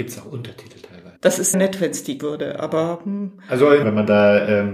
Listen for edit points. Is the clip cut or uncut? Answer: cut